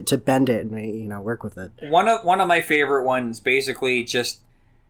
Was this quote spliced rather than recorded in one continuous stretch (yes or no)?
no